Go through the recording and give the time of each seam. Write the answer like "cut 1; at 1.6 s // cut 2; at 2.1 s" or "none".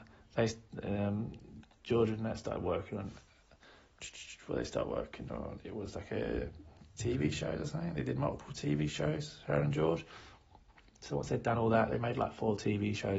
none